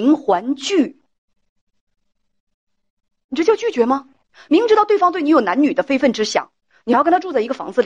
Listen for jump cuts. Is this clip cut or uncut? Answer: uncut